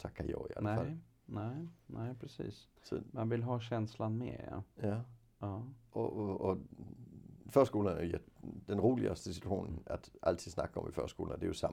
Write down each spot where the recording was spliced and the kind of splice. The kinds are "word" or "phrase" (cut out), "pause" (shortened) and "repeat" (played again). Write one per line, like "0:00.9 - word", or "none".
0:02.8 - pause